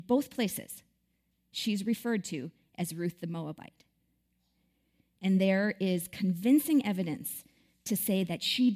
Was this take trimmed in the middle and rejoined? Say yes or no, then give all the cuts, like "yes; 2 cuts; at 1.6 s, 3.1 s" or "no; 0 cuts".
no; 0 cuts